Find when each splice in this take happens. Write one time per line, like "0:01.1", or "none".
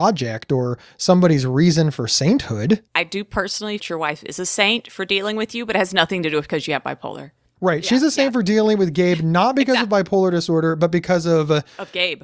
0:02.9
0:03.8